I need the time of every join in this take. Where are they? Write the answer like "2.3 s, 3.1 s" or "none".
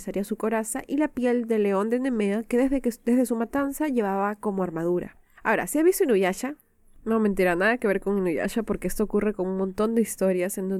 none

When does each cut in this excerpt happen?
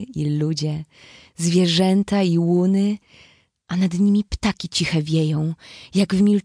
none

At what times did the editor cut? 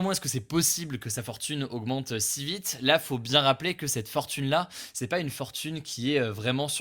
none

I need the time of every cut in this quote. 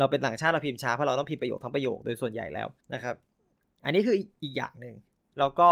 2.8 s, 3.5 s

